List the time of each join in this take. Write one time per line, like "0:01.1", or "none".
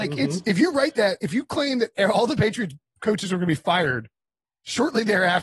none